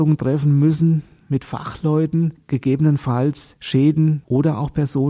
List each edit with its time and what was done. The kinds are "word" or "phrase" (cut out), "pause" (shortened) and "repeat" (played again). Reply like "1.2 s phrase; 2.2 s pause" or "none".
2.4 s word